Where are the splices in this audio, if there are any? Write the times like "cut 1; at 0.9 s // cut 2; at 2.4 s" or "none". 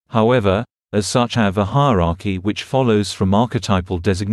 cut 1; at 1.3 s